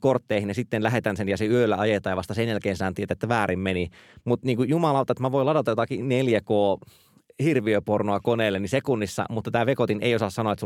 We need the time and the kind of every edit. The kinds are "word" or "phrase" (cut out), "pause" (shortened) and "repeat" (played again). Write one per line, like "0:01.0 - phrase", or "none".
none